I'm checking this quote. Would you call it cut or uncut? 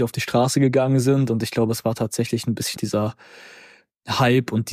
cut